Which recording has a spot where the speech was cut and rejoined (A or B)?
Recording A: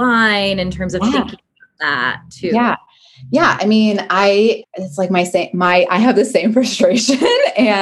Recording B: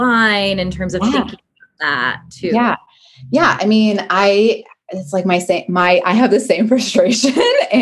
A